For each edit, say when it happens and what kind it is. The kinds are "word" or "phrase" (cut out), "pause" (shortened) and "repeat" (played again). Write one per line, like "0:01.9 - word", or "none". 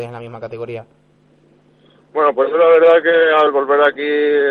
none